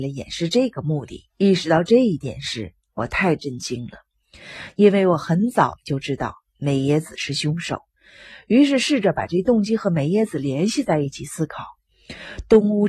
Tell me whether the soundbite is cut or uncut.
cut